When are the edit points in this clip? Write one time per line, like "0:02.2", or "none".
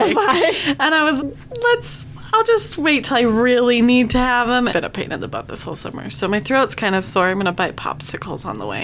0:01.2
0:04.7